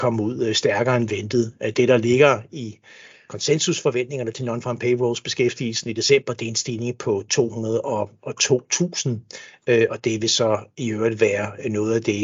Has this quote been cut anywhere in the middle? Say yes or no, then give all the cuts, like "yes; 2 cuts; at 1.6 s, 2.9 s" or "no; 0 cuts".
no; 0 cuts